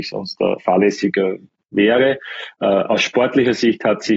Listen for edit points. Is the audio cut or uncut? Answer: cut